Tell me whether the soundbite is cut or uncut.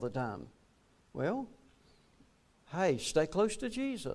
uncut